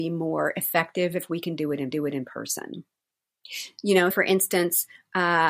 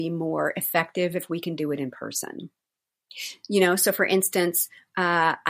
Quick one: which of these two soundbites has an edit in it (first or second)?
first